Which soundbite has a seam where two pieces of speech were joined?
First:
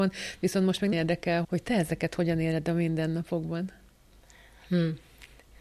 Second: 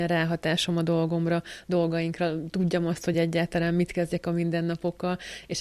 first; 2 cuts; at 0.9 s, 1.4 s

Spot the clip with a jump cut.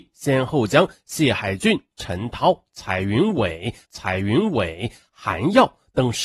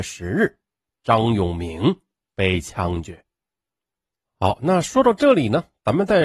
first; 1 cut; at 3.8 s

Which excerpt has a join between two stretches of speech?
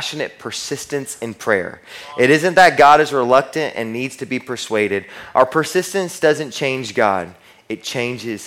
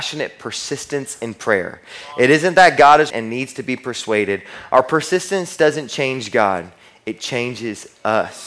second; 1 cut; at 3.1 s

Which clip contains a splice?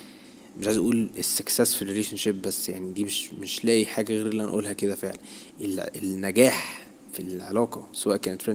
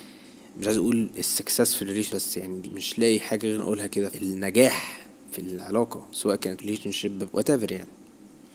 second; 6 cuts; at 2.1 s, 2.6 s, 3.6 s, 4.1 s, 6.6 s, 7.3 s

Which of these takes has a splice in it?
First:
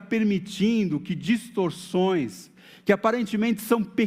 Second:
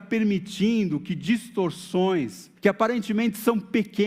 second; 1 cut; at 2.6 s

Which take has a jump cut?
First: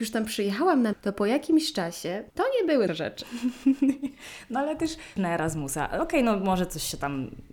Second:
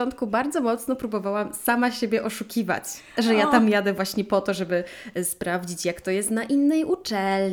first; 4 cuts; at 0.9 s, 2.3 s, 2.9 s, 5.2 s

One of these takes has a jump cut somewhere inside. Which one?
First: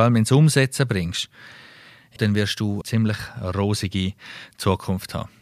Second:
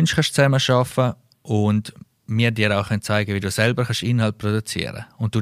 first; 2 cuts; at 2.2 s, 2.8 s

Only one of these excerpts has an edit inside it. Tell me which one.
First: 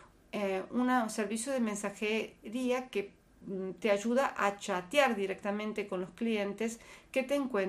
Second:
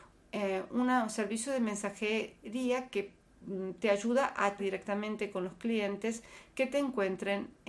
second; 1 cut; at 4.6 s

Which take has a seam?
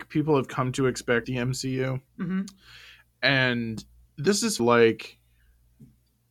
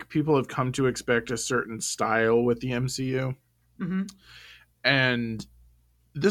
first; 4 cuts; at 1.2 s, 2.1 s, 4.1 s, 4.6 s

